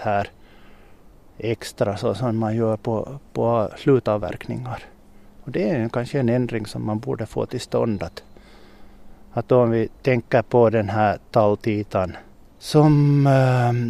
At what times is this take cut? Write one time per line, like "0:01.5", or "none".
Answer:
0:03.3
0:09.2
0:12.3